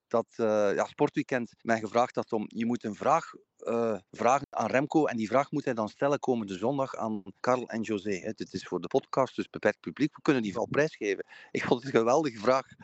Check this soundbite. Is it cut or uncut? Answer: cut